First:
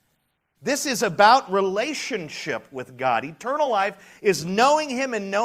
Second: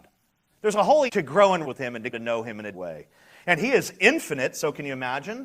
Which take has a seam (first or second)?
second